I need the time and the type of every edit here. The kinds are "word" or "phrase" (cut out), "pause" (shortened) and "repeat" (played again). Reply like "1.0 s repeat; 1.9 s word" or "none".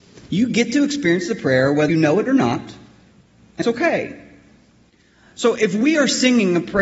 1.9 s word; 3.6 s word